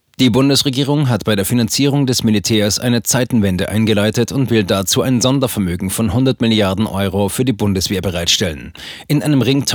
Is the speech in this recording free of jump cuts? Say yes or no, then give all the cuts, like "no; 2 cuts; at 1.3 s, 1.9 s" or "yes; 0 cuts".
yes; 0 cuts